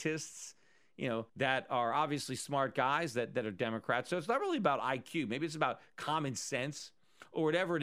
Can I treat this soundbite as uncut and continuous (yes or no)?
no